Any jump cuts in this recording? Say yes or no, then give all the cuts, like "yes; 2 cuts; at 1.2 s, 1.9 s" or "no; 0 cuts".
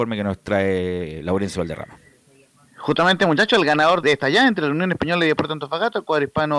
yes; 1 cut; at 4.0 s